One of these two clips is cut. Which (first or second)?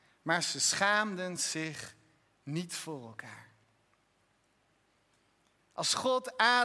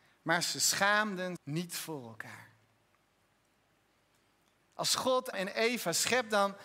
second